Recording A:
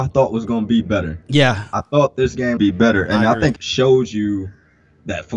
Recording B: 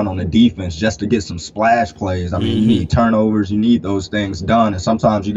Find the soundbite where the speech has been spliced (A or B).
A